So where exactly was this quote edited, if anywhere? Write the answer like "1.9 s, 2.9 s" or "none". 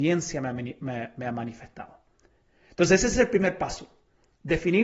none